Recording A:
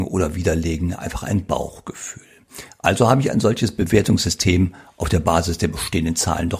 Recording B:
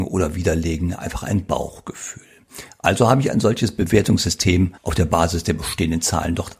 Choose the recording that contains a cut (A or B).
B